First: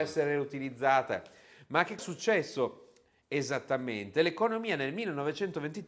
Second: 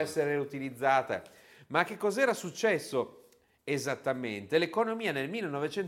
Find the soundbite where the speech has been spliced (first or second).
first